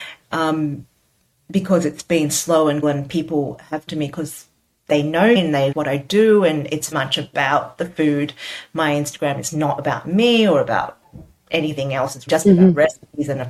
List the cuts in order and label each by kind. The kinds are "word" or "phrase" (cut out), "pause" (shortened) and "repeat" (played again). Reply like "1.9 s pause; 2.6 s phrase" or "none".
2.8 s word; 3.9 s word; 5.4 s word; 5.7 s word; 6.9 s word; 12.3 s word